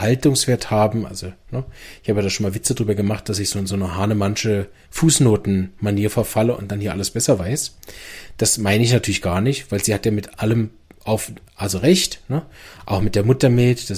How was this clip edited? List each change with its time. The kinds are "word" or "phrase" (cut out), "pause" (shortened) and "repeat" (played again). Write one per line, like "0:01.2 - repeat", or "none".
none